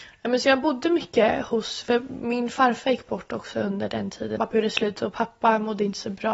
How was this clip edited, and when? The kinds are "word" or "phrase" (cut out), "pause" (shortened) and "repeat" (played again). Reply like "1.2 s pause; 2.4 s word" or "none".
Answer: 4.4 s phrase